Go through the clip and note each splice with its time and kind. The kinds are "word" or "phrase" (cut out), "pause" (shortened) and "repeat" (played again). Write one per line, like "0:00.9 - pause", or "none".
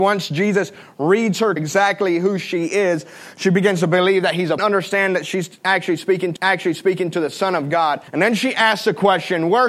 0:01.6 - phrase
0:04.6 - phrase
0:06.4 - repeat
0:08.1 - pause